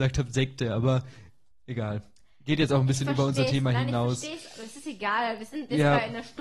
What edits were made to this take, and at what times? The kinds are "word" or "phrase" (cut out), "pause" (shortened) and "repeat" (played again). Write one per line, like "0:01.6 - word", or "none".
0:01.5 - word